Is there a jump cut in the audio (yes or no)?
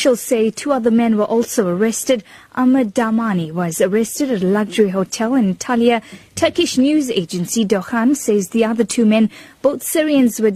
no